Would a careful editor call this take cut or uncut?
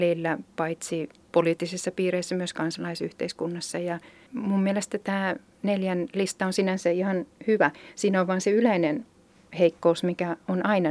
uncut